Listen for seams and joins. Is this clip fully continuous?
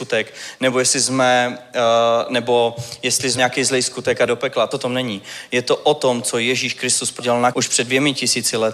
no; 5 cuts; at 3.4 s, 4.3 s, 4.7 s, 7.2 s, 7.5 s

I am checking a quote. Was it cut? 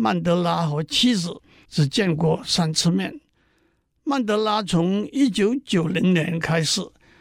no; 0 cuts

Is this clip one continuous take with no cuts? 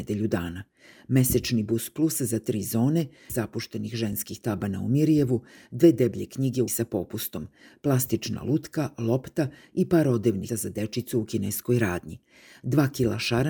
no; 3 cuts; at 3.3 s, 6.7 s, 10.5 s

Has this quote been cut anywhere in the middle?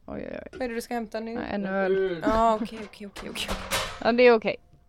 no; 0 cuts

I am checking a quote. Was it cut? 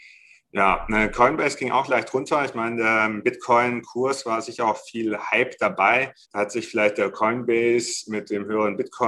yes; 1 cut; at 6.2 s

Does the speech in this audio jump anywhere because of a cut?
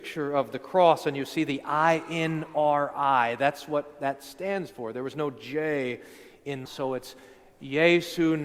yes; 1 cut; at 6.7 s

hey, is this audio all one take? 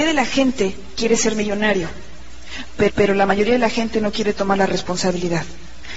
no; 1 cut; at 2.9 s

